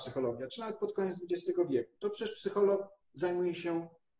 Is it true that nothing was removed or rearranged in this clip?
yes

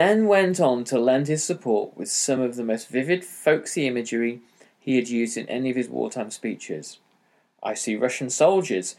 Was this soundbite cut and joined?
no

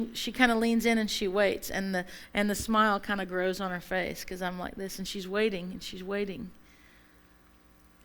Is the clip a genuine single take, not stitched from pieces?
yes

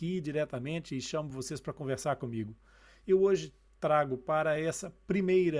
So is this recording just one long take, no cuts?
yes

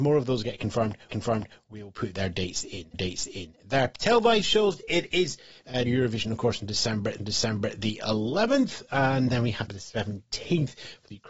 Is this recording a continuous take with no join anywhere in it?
no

